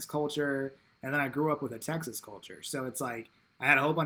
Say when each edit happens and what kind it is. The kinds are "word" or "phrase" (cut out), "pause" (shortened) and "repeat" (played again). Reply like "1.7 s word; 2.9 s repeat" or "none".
none